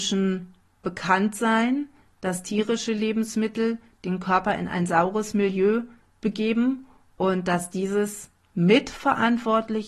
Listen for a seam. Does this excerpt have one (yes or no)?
no